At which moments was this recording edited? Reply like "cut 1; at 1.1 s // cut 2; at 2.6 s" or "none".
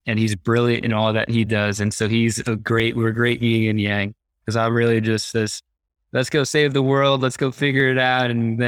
none